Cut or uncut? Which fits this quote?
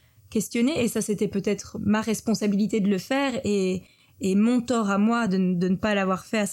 uncut